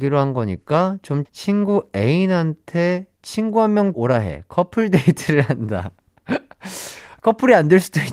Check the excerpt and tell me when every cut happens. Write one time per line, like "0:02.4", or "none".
0:01.3
0:03.9